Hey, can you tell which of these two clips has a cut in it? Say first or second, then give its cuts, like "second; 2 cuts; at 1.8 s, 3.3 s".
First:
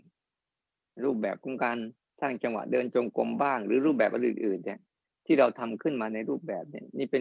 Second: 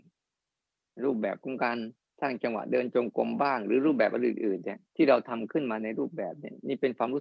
second; 1 cut; at 4.9 s